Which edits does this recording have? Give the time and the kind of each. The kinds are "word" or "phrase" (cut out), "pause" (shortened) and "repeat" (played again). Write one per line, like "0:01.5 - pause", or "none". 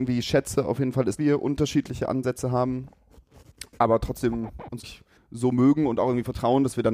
0:01.2 - word
0:03.7 - pause
0:04.8 - word
0:05.2 - pause